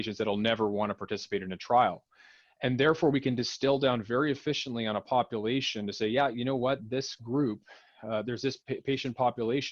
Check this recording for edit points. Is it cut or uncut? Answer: cut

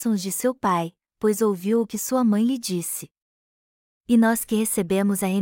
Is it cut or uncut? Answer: uncut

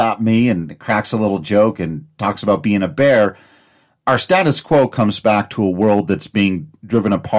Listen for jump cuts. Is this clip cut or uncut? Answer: uncut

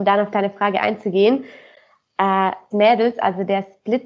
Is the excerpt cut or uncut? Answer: cut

